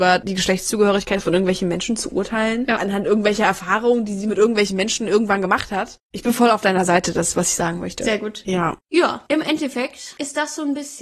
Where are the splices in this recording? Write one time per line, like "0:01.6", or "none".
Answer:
0:08.8